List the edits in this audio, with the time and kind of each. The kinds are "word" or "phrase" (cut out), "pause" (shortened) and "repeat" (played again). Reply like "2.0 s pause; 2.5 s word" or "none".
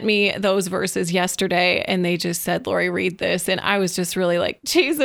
none